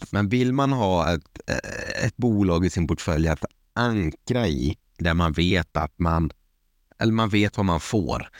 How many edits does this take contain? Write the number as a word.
zero